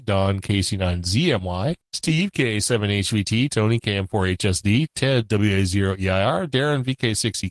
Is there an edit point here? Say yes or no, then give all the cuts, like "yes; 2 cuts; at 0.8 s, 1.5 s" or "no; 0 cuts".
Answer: yes; 1 cut; at 1.8 s